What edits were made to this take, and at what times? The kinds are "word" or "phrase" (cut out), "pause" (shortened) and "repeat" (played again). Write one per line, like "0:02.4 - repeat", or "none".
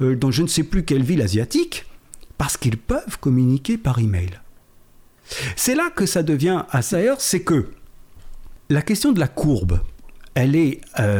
0:06.9 - word
0:08.6 - pause